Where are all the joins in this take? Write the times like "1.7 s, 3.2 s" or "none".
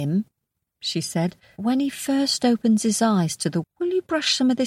1.6 s, 3.6 s